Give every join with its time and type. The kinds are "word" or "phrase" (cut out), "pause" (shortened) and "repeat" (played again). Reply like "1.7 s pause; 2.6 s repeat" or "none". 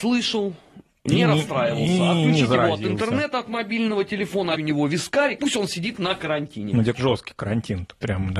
4.5 s word; 5.4 s word; 6.9 s word